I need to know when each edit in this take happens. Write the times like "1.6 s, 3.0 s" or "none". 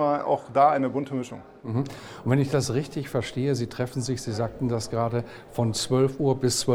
none